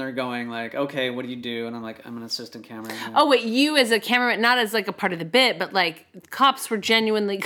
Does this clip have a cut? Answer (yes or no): no